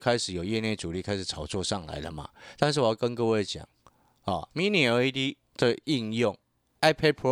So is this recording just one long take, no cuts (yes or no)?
yes